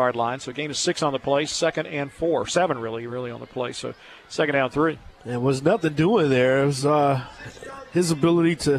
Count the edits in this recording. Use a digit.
0